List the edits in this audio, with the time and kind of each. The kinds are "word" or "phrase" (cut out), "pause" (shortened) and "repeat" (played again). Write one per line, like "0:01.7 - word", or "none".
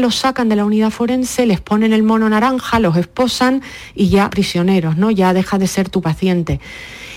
0:04.3 - word